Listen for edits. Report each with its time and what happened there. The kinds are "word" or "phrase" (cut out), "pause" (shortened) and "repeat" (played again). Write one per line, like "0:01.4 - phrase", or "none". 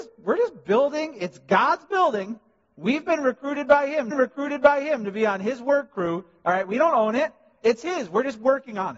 0:04.1 - repeat

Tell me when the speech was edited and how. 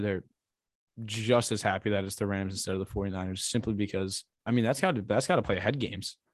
0:04.3 - pause

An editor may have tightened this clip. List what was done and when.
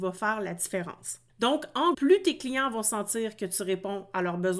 0:01.3 - pause
0:01.9 - word

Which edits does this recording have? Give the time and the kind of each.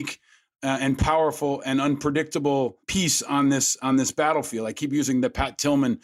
0:02.8 - pause

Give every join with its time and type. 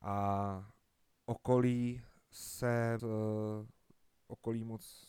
0:01.1 - word
0:03.0 - word

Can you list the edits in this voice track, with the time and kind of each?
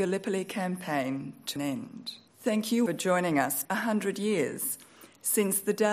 0:01.6 - word
0:02.3 - pause
0:02.9 - phrase
0:03.6 - phrase

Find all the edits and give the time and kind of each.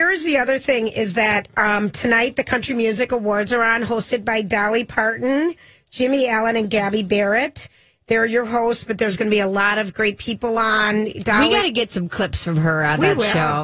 none

